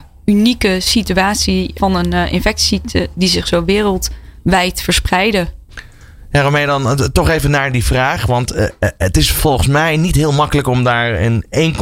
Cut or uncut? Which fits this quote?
uncut